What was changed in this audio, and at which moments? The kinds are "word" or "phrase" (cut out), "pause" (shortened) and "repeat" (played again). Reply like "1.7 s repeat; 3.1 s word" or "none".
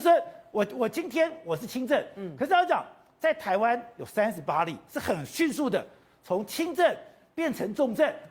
none